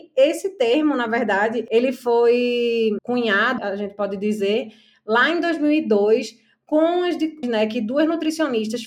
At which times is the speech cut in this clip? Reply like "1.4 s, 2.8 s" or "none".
3.0 s, 3.6 s, 7.4 s